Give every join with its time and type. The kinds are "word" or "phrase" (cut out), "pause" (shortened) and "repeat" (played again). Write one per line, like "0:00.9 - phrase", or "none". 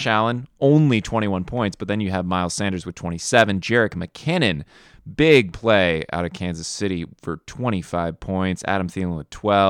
none